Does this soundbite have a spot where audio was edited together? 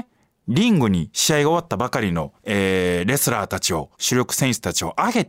yes; 2 cuts; at 2.4 s, 3.9 s

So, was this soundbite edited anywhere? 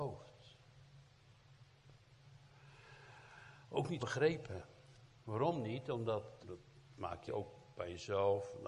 yes; 3 cuts; at 4.0 s, 6.4 s, 7.3 s

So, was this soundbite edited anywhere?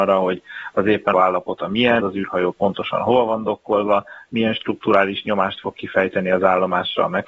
yes; 2 cuts; at 1.1 s, 2.0 s

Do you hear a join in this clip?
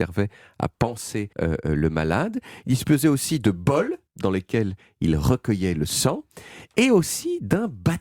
yes; 2 cuts; at 1.3 s, 4.1 s

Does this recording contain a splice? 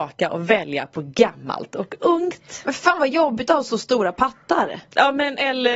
no; 0 cuts

